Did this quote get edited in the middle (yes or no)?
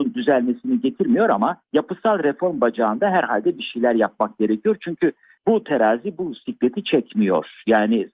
no